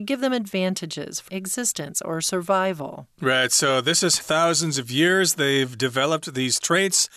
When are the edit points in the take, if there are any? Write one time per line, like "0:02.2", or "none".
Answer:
0:01.3
0:03.1
0:04.2